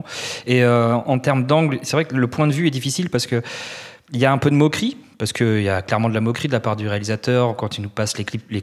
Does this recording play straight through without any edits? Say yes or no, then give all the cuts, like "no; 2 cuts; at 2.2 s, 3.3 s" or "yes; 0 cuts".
yes; 0 cuts